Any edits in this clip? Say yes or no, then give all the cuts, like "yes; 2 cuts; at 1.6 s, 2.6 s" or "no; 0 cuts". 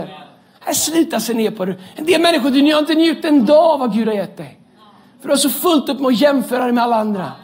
no; 0 cuts